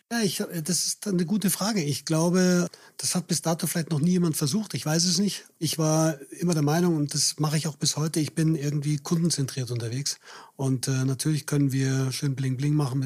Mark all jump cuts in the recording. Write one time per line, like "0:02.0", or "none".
none